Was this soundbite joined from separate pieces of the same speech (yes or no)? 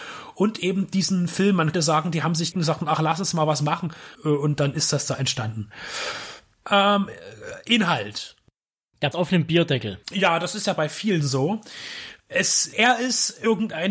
yes